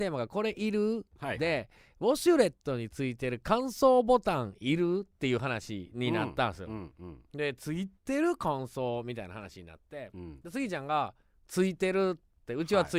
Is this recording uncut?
no; 1 cut; at 8.0 s

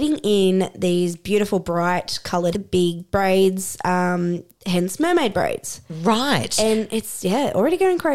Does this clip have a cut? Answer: yes; 1 cut; at 2.5 s

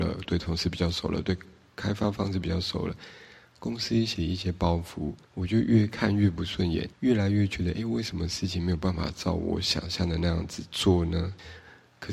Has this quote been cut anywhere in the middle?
yes; 3 cuts; at 4.2 s, 5.2 s, 6.9 s

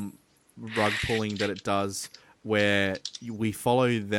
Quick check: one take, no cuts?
yes; 0 cuts

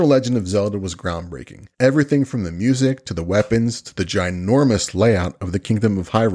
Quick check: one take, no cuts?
no; 1 cut; at 1.7 s

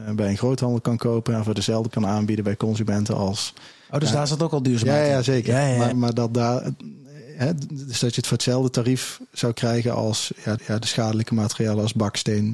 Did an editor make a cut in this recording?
yes; 4 cuts; at 1.9 s, 5.9 s, 9.5 s, 10.6 s

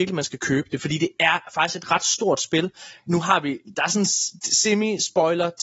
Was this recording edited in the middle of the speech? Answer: no; 0 cuts

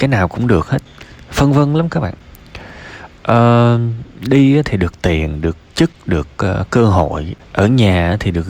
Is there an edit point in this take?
no; 0 cuts

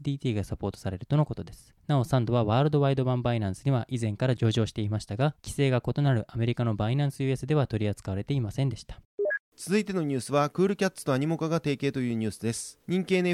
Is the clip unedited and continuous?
yes; 0 cuts

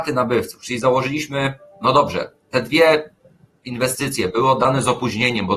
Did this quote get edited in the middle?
no; 0 cuts

